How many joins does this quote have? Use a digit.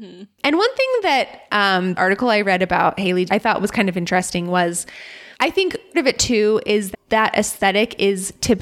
5